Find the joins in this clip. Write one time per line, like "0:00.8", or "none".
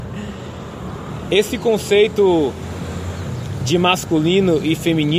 none